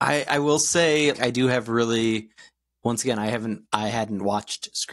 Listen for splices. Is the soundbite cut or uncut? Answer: cut